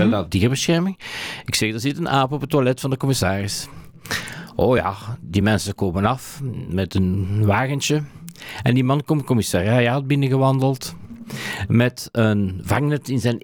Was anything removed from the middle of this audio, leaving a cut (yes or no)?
no